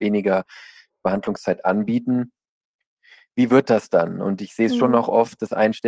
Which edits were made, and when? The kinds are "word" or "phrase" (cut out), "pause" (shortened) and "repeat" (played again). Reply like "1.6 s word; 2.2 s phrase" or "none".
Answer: none